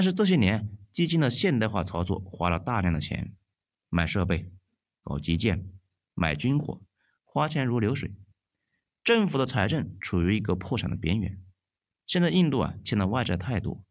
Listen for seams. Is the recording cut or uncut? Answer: uncut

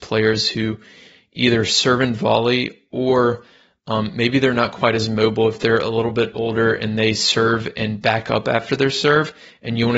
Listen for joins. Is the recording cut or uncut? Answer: uncut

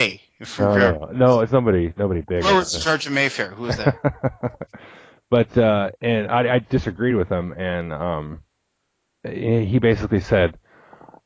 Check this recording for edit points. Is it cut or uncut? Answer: uncut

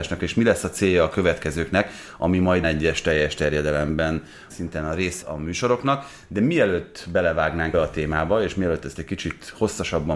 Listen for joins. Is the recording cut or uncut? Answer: cut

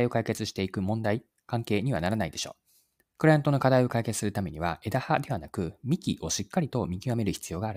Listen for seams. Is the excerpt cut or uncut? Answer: cut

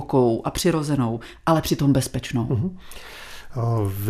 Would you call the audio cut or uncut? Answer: uncut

